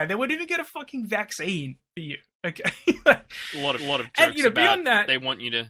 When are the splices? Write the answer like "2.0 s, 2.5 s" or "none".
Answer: 3.8 s